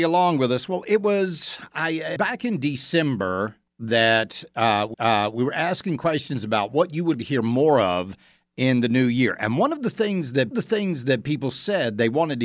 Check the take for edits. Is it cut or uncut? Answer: cut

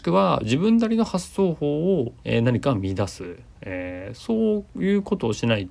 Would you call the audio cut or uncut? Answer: cut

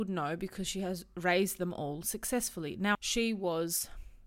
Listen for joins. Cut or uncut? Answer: cut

